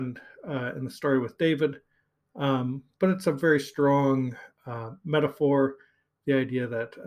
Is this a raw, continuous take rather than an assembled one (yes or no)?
yes